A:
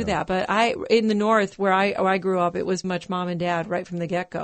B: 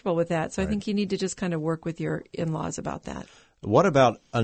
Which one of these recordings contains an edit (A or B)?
A